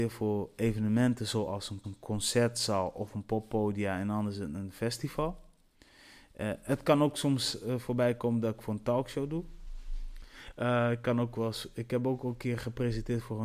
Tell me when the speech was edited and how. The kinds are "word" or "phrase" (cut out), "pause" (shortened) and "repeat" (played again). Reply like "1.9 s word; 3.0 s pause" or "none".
1.8 s repeat